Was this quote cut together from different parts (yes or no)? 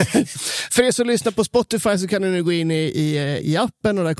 no